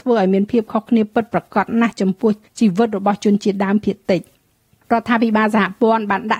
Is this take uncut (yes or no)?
yes